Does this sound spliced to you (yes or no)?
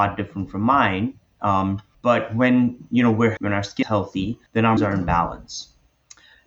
yes